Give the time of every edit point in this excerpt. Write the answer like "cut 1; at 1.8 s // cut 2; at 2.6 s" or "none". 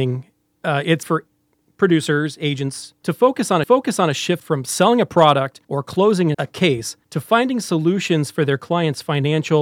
cut 1; at 1.0 s // cut 2; at 3.6 s // cut 3; at 5.6 s // cut 4; at 6.3 s // cut 5; at 7.0 s